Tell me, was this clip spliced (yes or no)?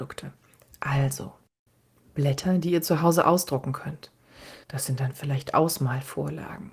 yes